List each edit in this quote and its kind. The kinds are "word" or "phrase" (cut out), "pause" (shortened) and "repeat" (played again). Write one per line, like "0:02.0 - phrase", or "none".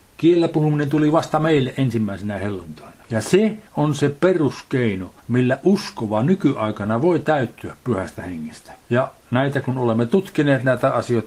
0:03.0 - pause
0:03.7 - pause
0:05.2 - pause
0:08.8 - pause